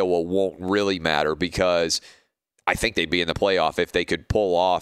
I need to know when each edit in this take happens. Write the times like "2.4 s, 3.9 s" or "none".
none